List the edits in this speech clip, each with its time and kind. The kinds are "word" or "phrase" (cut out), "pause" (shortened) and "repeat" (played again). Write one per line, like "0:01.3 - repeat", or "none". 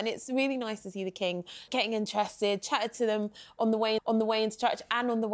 0:01.7 - word
0:04.0 - repeat